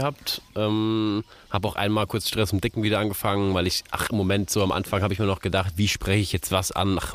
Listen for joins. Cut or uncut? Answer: uncut